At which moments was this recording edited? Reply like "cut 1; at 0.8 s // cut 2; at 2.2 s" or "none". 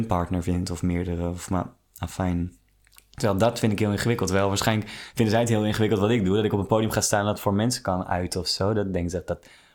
none